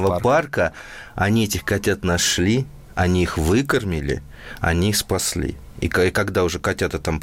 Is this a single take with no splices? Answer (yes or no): yes